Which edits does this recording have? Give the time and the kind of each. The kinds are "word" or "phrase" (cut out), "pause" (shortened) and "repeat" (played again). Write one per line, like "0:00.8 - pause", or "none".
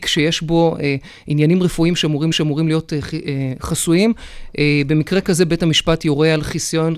0:02.3 - repeat